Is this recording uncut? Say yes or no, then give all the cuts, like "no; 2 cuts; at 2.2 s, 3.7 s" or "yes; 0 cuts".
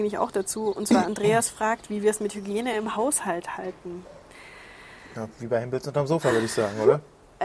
yes; 0 cuts